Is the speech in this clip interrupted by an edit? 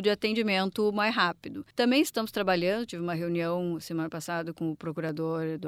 yes; 1 cut; at 1.7 s

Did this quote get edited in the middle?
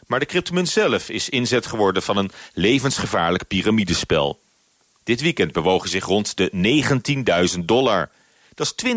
no; 0 cuts

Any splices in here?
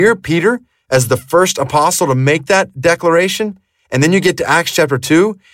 no; 0 cuts

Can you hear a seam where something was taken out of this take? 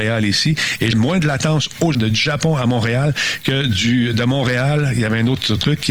yes; 2 cuts; at 0.9 s, 1.9 s

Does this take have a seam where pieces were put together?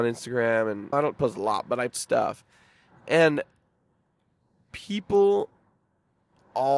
yes; 2 cuts; at 0.9 s, 1.9 s

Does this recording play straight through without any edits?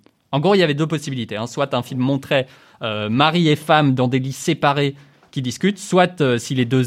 yes; 0 cuts

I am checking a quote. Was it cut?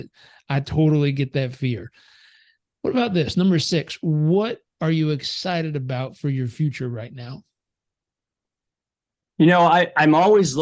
no; 0 cuts

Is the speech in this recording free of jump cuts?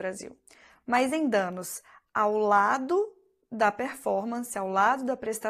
yes; 0 cuts

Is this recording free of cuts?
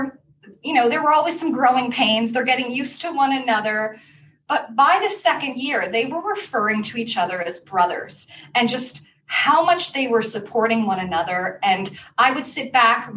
yes; 0 cuts

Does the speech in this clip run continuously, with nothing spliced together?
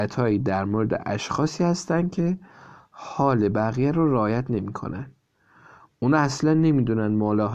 yes; 0 cuts

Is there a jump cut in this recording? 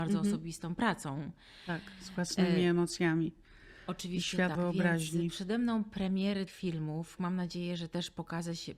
yes; 3 cuts; at 4.5 s, 6.5 s, 7.2 s

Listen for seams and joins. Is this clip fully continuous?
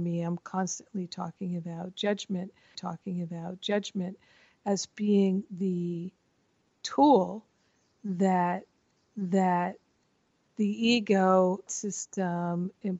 no; 3 cuts; at 2.7 s, 9.0 s, 11.7 s

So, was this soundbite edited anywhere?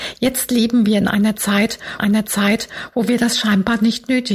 yes; 1 cut; at 2.0 s

